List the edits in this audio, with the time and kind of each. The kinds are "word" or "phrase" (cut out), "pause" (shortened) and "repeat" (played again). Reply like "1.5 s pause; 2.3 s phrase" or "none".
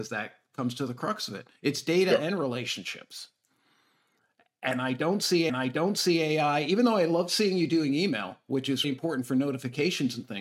1.6 s pause; 5.5 s repeat; 8.8 s word